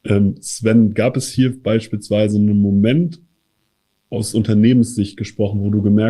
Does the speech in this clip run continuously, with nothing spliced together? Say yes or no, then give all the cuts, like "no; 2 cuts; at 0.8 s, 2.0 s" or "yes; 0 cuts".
yes; 0 cuts